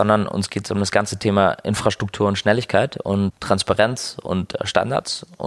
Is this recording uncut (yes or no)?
yes